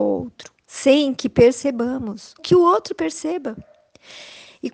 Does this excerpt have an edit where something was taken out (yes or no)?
yes